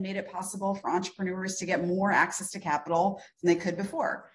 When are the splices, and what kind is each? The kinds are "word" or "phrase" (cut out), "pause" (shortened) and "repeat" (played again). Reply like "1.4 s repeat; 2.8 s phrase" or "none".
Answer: none